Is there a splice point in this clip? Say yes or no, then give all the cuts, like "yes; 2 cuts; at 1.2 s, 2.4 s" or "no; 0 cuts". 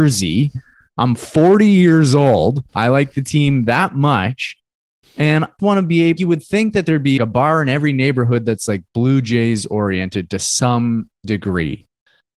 yes; 3 cuts; at 5.6 s, 6.2 s, 7.2 s